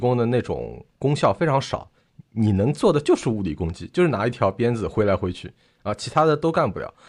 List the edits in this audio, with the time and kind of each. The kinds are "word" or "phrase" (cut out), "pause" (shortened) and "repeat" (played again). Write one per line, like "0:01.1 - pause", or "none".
0:00.9 - pause